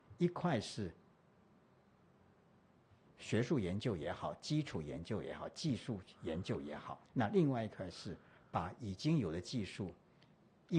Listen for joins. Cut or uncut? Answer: cut